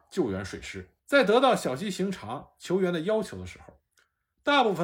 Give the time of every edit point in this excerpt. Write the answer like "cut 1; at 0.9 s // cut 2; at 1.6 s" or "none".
cut 1; at 1.0 s